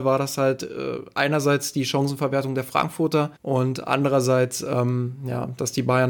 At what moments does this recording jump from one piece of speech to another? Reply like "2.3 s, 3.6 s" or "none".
3.4 s